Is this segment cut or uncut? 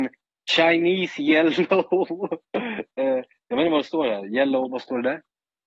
uncut